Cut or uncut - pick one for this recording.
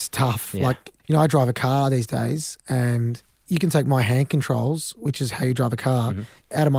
uncut